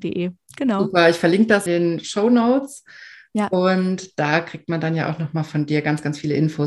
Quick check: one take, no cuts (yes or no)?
no